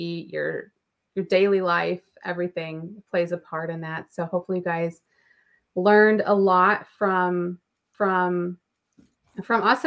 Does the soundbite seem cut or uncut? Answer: cut